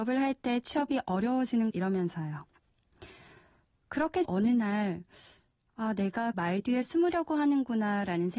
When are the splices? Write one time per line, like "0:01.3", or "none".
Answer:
0:01.7
0:04.2
0:06.3